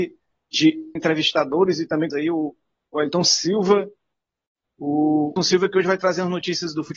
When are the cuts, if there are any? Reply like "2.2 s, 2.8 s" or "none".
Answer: 1.0 s, 2.1 s, 5.4 s